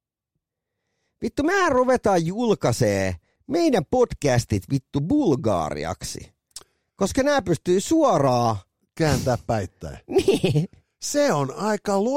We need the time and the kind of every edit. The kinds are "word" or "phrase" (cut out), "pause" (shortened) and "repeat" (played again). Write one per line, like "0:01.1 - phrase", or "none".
0:03.4 - pause